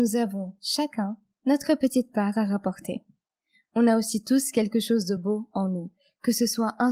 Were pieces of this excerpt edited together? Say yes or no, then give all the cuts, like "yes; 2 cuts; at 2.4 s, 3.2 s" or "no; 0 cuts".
no; 0 cuts